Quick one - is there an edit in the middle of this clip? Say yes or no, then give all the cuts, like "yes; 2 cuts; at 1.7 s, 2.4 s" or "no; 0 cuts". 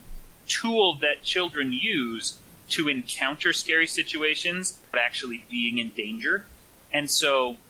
yes; 1 cut; at 4.9 s